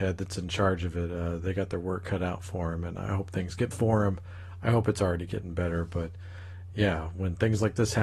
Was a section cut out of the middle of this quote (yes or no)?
yes